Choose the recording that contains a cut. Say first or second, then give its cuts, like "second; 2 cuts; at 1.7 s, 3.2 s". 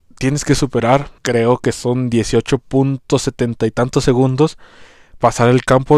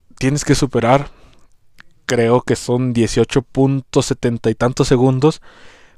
first; 1 cut; at 1.2 s